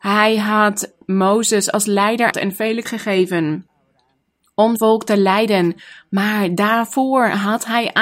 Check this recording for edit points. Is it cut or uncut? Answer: cut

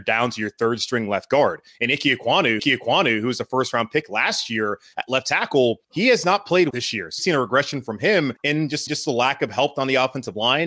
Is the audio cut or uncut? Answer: cut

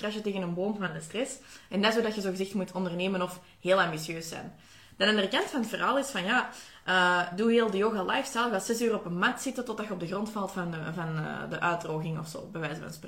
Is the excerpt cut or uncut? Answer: uncut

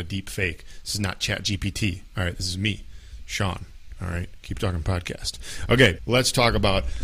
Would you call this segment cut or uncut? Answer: cut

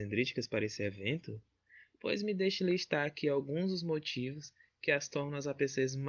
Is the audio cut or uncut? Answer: uncut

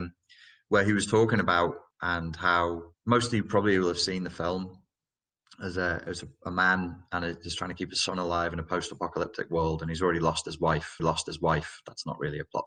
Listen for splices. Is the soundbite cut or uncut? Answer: cut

